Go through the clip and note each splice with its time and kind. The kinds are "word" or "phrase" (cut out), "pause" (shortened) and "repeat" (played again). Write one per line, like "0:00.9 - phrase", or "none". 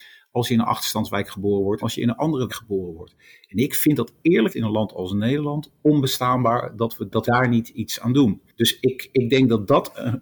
0:01.8 - word
0:02.5 - word
0:04.5 - word
0:07.2 - word
0:08.8 - word

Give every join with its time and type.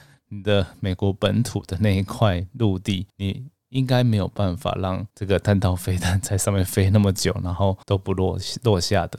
0:03.1 - pause
0:05.1 - pause
0:07.8 - pause

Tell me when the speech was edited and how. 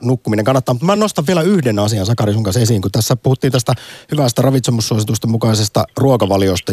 none

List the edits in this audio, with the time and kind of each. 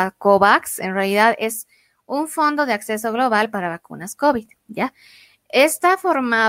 none

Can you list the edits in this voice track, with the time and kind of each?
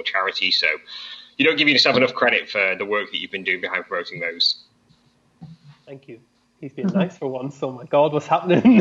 none

